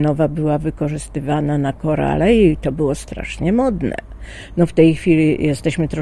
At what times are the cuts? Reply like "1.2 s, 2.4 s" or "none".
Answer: none